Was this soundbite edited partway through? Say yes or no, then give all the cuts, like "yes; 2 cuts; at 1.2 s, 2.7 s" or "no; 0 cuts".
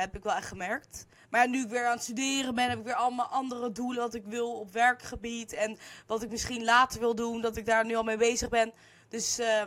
no; 0 cuts